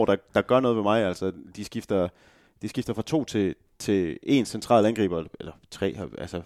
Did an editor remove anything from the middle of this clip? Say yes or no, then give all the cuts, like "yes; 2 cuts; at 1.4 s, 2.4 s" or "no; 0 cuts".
no; 0 cuts